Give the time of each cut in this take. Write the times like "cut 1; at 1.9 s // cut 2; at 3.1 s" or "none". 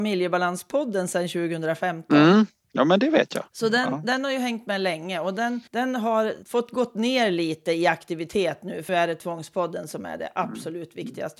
cut 1; at 5.7 s // cut 2; at 6.4 s // cut 3; at 8.9 s